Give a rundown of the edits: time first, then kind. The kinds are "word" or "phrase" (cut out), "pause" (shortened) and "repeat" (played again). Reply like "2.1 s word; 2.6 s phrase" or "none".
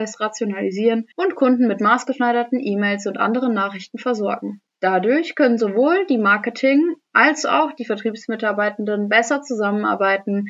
1.1 s pause